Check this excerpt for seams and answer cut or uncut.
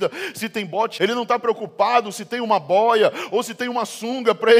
cut